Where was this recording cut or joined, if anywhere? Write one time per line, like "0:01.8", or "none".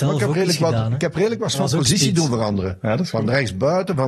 0:01.5